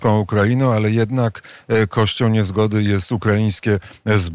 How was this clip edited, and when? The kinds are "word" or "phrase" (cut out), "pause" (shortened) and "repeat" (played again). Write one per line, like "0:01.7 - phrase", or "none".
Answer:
none